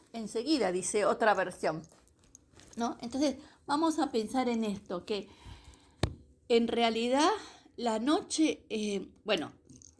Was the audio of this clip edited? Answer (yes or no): no